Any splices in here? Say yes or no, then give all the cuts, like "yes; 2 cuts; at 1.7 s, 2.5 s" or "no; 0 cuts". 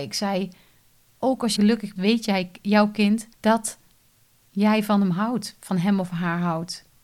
yes; 3 cuts; at 1.6 s, 2.0 s, 3.3 s